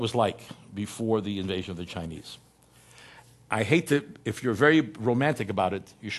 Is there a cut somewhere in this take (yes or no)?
no